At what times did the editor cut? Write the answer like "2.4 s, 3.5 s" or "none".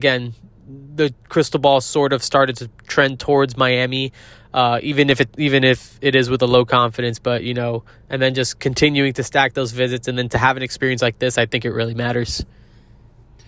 none